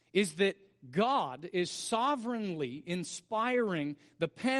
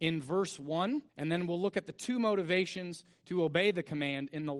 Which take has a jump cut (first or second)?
second